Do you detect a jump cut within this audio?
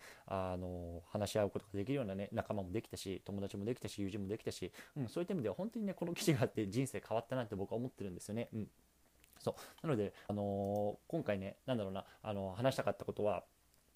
yes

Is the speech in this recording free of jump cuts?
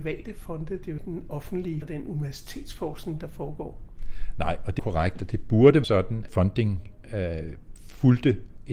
no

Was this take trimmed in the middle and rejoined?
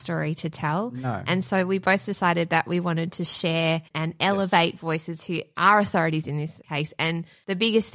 yes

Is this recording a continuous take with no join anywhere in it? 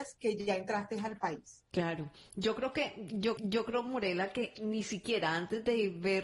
no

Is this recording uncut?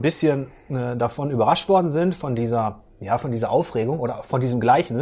yes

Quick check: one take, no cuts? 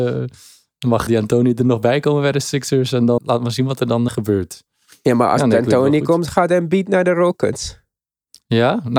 no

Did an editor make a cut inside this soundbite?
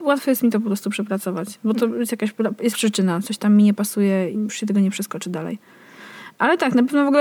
yes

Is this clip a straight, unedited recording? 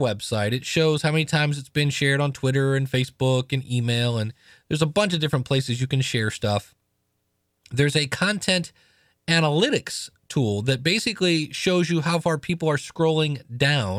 yes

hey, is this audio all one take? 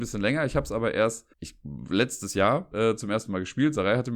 no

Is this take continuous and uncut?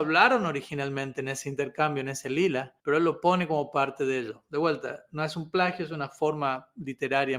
no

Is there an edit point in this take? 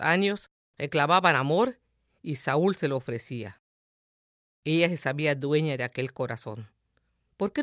no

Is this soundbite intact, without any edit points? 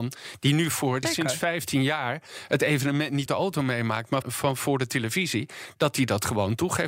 no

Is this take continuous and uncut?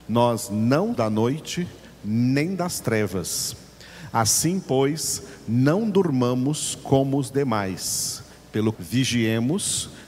no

